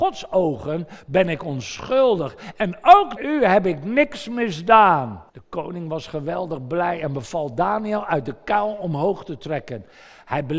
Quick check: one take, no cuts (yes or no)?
no